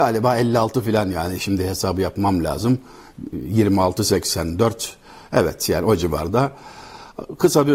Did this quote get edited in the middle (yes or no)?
no